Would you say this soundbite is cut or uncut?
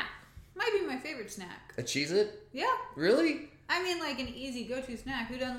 uncut